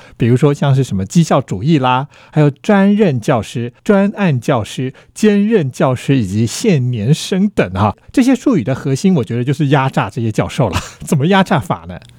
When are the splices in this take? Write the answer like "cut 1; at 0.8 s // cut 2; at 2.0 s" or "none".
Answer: cut 1; at 3.8 s

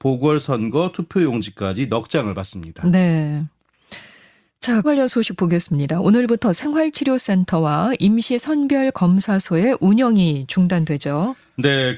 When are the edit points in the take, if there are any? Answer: cut 1; at 4.8 s

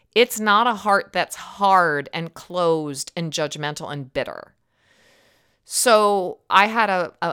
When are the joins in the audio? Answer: none

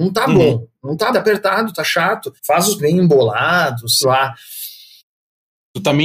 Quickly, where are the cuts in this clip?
cut 1; at 1.1 s // cut 2; at 2.4 s // cut 3; at 2.8 s // cut 4; at 4.0 s

